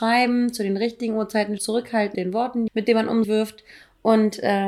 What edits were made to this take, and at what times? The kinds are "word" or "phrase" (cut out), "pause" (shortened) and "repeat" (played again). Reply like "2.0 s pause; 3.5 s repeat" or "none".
1.6 s word; 2.1 s word; 2.7 s word; 3.2 s word

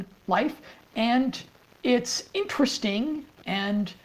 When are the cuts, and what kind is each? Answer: none

